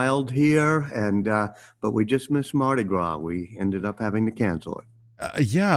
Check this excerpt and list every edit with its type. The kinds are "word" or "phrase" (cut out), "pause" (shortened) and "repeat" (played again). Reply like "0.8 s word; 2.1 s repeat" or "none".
none